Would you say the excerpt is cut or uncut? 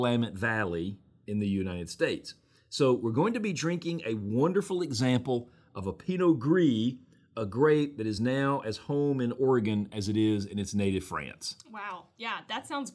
uncut